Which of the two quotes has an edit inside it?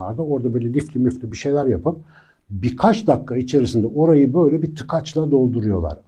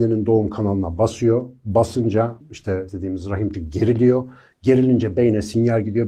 second; 3 cuts; at 2.4 s, 2.9 s, 3.5 s

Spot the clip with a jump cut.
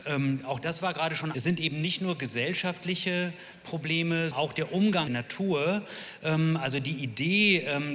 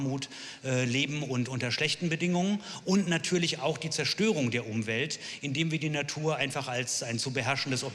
first; 3 cuts; at 1.3 s, 4.3 s, 5.1 s

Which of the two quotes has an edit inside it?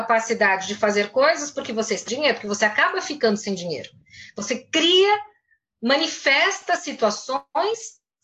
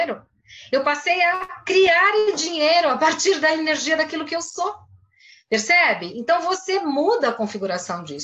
first; 1 cut; at 2.1 s

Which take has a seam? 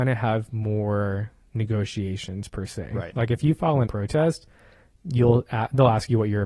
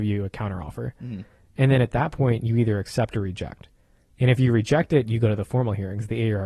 first; 1 cut; at 3.9 s

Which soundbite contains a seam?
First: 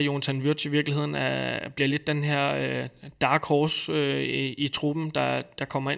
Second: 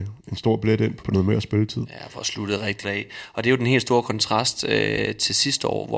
second; 2 cuts; at 1.0 s, 2.8 s

